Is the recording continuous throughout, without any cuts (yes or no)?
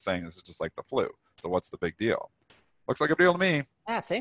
no